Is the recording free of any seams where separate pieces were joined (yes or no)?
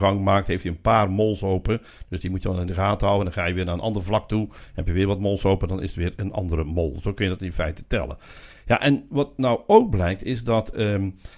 yes